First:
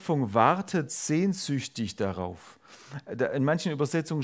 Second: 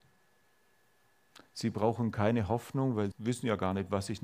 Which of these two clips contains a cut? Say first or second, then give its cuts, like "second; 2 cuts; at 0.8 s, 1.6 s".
second; 1 cut; at 3.1 s